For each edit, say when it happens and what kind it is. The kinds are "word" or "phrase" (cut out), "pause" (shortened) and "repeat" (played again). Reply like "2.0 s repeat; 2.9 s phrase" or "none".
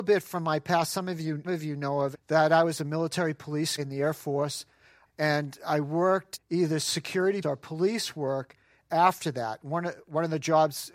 1.4 s word; 2.1 s word; 3.8 s word; 5.0 s word; 6.3 s word; 7.4 s word